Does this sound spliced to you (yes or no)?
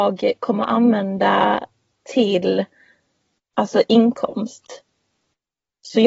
yes